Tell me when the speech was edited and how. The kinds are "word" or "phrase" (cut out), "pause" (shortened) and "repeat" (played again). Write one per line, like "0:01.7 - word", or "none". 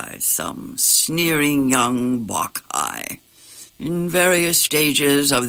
0:03.7 - pause